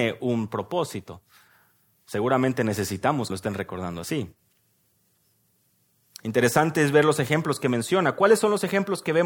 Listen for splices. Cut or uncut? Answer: cut